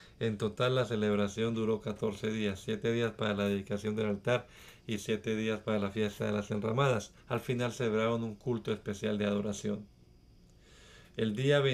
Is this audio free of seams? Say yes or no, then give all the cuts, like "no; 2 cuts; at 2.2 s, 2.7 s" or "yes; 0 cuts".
no; 1 cut; at 7.2 s